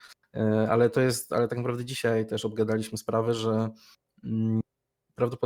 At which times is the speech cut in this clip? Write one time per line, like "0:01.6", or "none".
none